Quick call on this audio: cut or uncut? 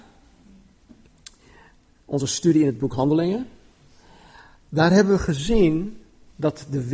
uncut